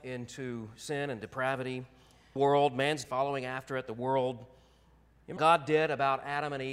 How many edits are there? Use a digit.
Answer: 3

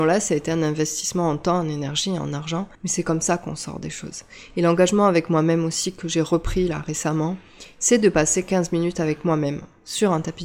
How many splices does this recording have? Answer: 1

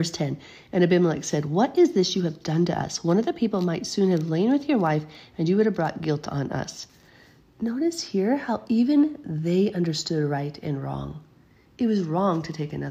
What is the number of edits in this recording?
0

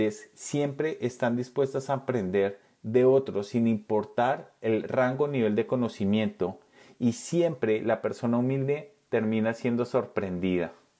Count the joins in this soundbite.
0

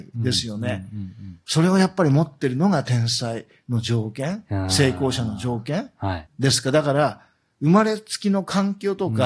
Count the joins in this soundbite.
1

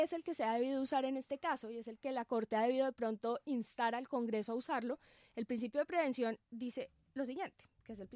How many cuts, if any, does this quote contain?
0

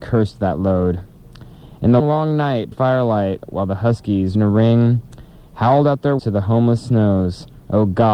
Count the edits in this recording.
4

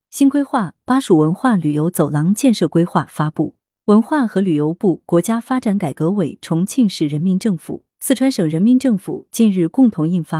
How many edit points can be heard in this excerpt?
1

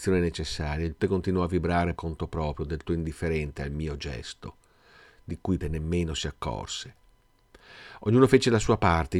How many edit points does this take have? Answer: 4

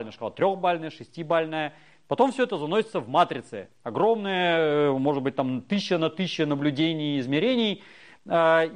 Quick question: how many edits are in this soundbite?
0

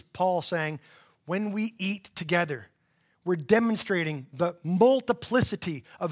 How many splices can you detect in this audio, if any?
0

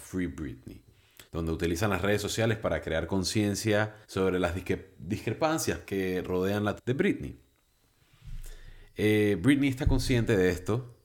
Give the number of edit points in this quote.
4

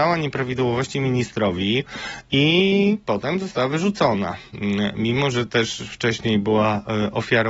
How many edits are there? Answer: 0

